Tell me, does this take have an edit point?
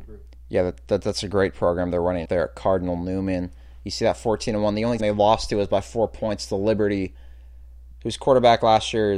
yes; 2 cuts; at 2.2 s, 5.0 s

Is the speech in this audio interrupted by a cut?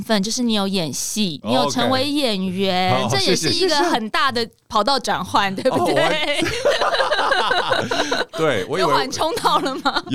no; 0 cuts

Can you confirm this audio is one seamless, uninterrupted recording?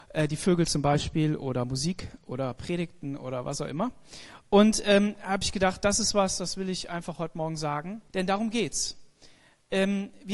no; 1 cut; at 8.1 s

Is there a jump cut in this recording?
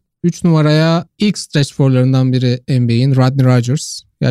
yes; 1 cut; at 2.6 s

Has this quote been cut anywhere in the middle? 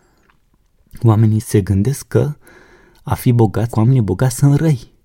yes; 2 cuts; at 1.4 s, 3.7 s

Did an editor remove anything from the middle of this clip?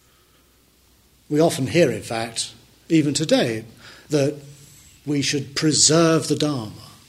no; 0 cuts

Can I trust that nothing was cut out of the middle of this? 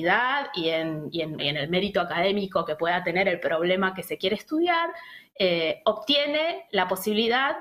no; 1 cut; at 1.4 s

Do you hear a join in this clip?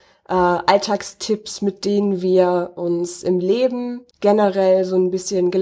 yes; 1 cut; at 4.1 s

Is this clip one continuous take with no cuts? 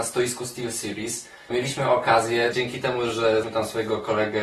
no; 3 cuts; at 1.5 s, 2.5 s, 3.4 s

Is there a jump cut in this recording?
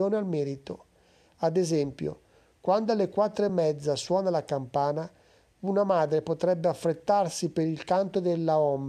no; 0 cuts

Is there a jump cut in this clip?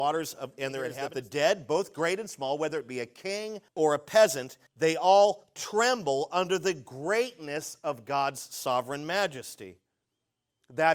yes; 2 cuts; at 3.7 s, 4.7 s

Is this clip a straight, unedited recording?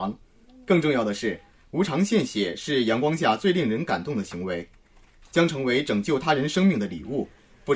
yes; 0 cuts

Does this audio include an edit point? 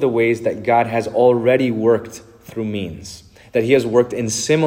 no; 0 cuts

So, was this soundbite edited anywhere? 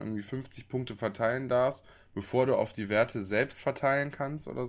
no; 0 cuts

